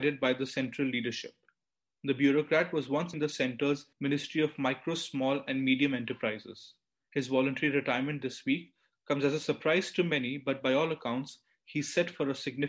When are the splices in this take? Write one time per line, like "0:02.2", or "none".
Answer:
0:03.1
0:03.9